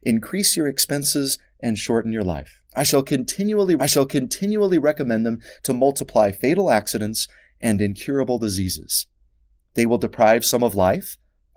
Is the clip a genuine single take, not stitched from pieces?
no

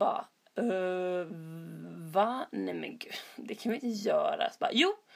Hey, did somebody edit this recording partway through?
no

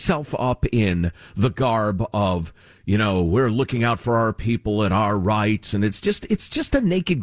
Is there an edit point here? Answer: no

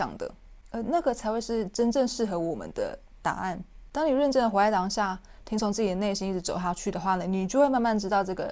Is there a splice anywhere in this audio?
no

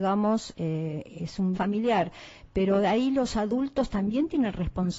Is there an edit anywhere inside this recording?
yes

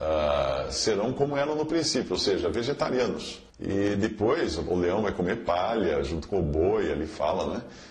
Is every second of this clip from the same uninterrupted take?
no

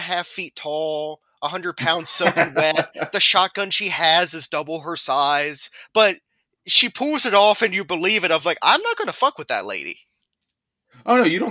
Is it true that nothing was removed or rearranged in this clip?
yes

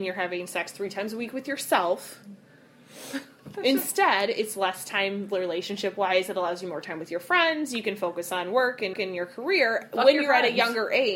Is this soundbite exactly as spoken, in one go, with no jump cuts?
no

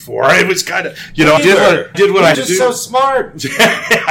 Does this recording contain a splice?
yes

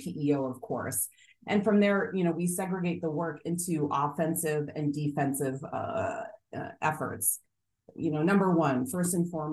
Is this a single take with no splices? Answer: yes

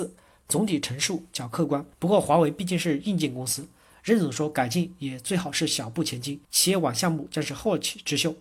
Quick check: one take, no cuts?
no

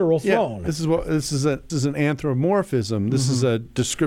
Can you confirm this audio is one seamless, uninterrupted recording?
no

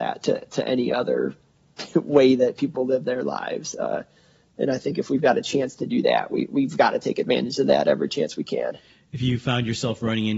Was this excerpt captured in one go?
yes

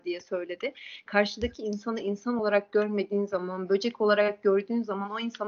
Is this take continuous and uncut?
yes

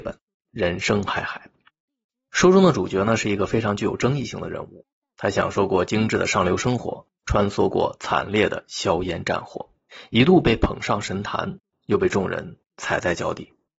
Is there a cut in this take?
no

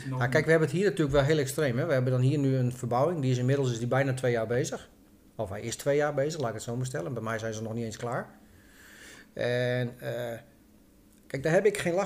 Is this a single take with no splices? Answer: yes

